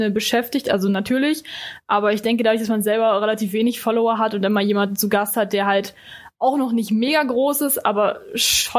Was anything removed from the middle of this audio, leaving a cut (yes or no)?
no